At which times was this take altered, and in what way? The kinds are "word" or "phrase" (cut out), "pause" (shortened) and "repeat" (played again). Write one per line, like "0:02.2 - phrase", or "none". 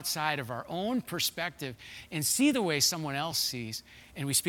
none

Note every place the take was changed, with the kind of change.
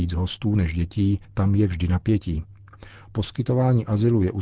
0:01.2 - pause

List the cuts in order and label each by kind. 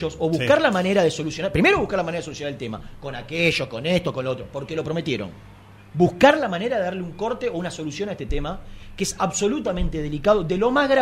0:05.8 - pause

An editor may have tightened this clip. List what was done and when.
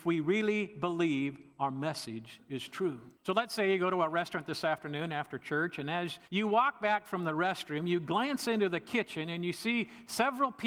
0:03.2 - pause
0:06.3 - pause

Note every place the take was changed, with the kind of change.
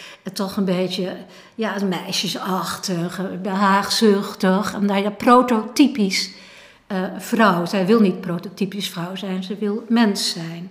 none

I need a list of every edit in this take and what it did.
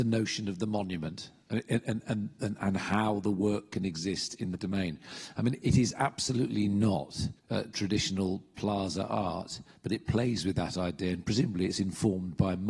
0:04.6 - word
0:07.4 - pause

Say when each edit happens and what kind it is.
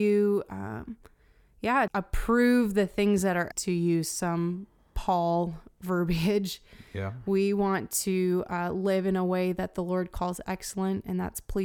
0:01.9 - word
0:03.5 - word

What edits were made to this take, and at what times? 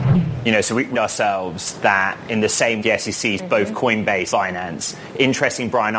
0:00.9 - word
0:02.8 - word
0:03.4 - word
0:04.3 - word

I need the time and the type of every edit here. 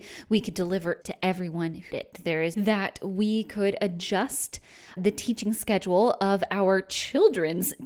0:01.0 - word
0:01.9 - word
0:02.5 - phrase
0:05.0 - word

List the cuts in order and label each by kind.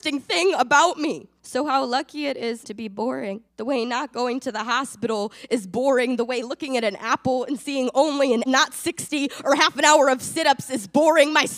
0:01.4 - pause
0:02.6 - word
0:03.5 - pause
0:08.5 - word

